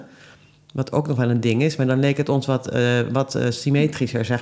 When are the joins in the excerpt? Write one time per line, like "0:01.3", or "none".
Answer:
none